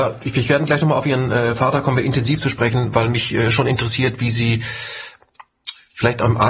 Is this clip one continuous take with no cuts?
yes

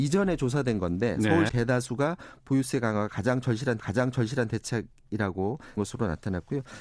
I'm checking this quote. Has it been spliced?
yes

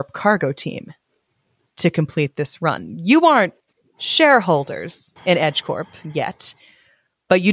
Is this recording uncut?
no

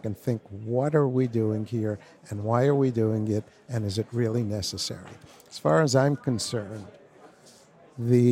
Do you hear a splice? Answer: no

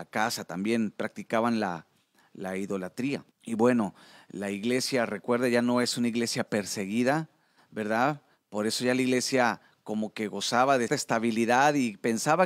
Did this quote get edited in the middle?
yes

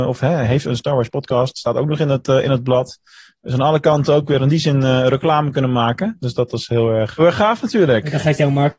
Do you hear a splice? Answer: yes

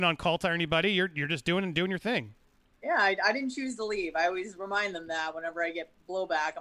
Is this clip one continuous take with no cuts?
yes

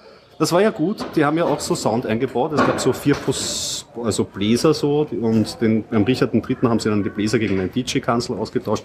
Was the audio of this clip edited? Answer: no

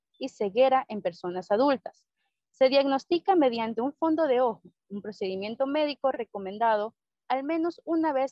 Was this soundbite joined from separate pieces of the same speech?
no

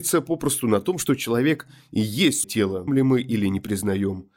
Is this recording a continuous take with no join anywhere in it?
no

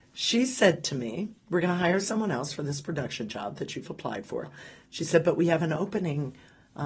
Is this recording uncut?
yes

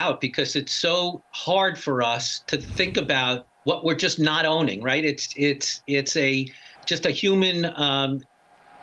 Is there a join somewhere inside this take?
yes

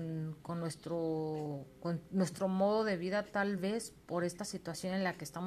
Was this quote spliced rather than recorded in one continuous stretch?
no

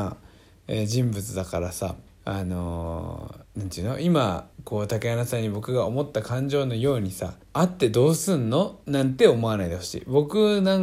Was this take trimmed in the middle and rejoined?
yes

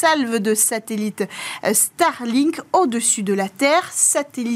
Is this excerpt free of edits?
yes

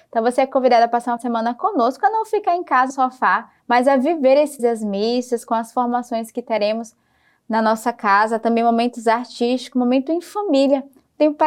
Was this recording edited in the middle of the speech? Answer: yes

